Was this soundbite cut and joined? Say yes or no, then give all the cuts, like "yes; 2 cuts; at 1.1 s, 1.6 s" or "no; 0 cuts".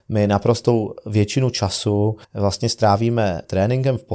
yes; 1 cut; at 2.2 s